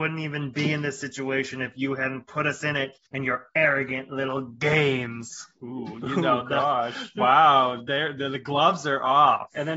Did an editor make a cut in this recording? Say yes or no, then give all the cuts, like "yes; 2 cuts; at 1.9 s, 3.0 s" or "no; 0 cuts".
yes; 1 cut; at 3.1 s